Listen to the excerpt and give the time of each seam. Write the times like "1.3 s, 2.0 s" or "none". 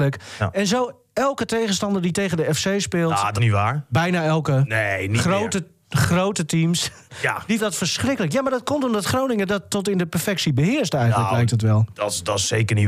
3.4 s, 7.6 s